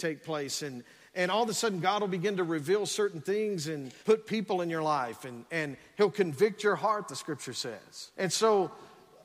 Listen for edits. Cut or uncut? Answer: cut